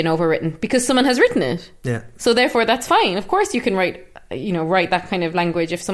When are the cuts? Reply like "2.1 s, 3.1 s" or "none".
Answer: none